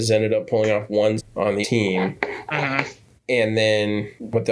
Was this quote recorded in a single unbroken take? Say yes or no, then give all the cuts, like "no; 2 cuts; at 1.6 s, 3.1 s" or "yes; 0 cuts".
no; 2 cuts; at 1.2 s, 1.6 s